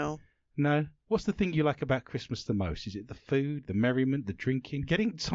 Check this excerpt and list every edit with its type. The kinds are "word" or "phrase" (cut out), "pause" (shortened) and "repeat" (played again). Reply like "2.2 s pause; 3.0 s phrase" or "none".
none

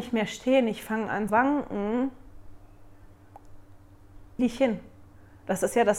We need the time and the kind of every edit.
1.3 s word; 4.4 s word

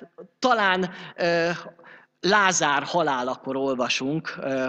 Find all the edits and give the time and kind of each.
none

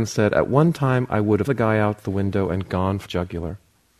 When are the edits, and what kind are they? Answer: 1.5 s word; 3.1 s word

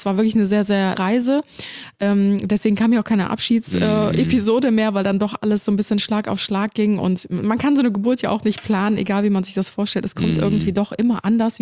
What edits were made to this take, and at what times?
1.0 s word

